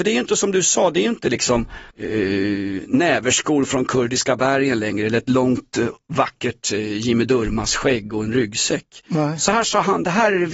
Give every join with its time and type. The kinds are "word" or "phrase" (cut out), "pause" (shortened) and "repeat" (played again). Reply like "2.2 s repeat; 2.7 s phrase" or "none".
1.9 s pause